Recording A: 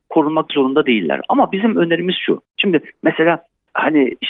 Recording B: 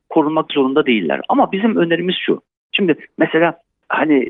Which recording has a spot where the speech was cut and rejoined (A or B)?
A